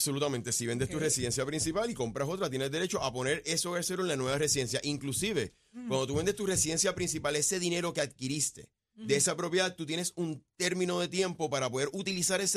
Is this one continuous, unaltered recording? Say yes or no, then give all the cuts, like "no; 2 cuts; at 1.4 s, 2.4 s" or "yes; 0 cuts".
yes; 0 cuts